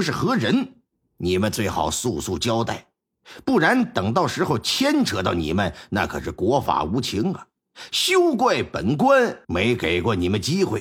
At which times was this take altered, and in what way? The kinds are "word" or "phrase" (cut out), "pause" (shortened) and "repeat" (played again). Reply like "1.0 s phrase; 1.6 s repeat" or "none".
9.4 s pause